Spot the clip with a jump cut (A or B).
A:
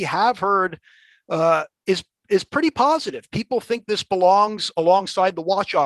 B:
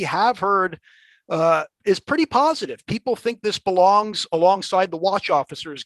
B